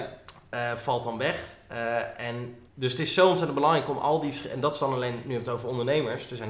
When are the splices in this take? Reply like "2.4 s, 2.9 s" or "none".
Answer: 2.7 s